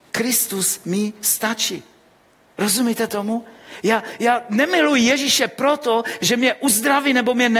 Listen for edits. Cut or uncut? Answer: uncut